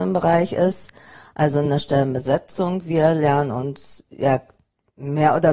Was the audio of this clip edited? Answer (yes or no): no